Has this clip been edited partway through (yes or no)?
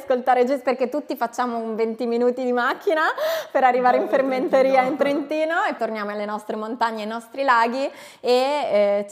yes